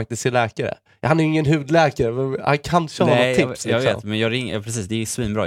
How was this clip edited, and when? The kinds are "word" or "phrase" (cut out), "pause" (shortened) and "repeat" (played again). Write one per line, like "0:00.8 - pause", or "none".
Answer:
none

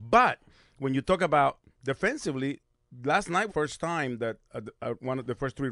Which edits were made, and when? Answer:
0:03.5 - phrase
0:04.4 - pause

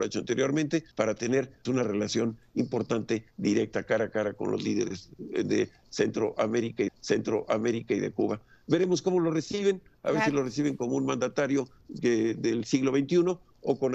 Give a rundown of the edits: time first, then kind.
0:00.9 - pause
0:01.7 - word
0:06.9 - repeat

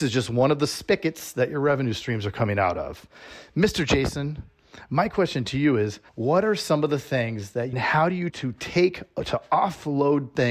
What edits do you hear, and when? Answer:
0:06.1 - pause
0:07.7 - phrase
0:08.3 - phrase

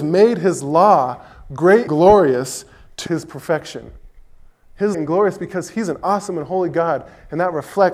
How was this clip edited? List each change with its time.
0:01.9 - word
0:03.1 - word
0:04.9 - phrase

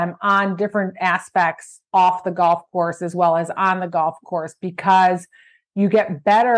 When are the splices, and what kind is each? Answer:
none

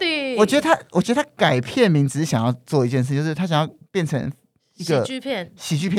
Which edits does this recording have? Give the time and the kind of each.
none

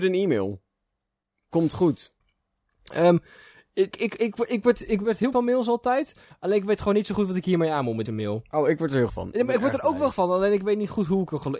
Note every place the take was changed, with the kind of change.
0:03.9 - word
0:05.3 - word
0:08.1 - word
0:09.1 - word
0:10.1 - word

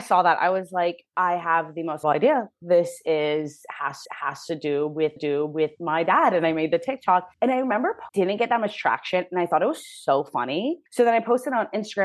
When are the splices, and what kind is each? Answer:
0:01.1 - pause
0:02.0 - word
0:04.1 - repeat
0:05.2 - repeat
0:07.3 - pause
0:08.1 - phrase
0:10.9 - pause

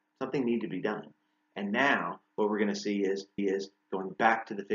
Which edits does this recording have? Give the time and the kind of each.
0:03.4 - repeat

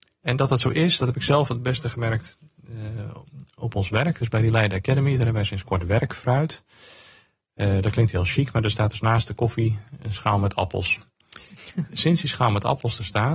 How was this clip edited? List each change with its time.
none

